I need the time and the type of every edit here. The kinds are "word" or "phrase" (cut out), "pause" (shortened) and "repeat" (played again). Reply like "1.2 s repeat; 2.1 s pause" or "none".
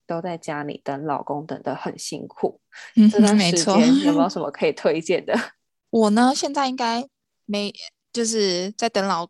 none

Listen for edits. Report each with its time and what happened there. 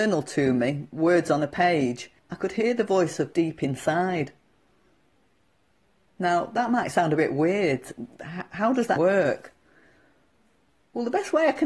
2.2 s pause; 3.3 s word; 9.0 s word

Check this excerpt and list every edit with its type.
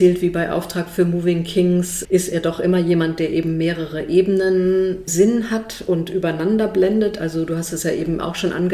2.0 s word; 5.1 s word

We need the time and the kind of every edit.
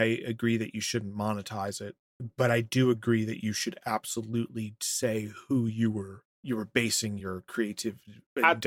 none

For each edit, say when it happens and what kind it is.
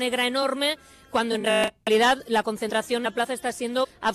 1.8 s pause

